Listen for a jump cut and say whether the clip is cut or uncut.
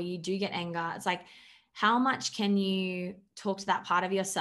uncut